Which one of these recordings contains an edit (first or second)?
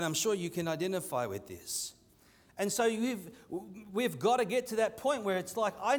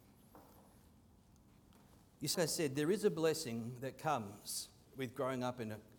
second